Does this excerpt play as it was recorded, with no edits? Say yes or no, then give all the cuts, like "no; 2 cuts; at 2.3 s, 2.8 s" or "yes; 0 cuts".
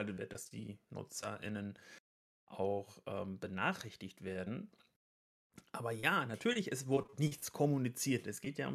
yes; 0 cuts